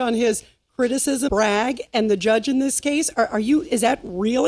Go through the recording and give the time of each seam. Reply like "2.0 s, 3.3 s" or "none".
1.3 s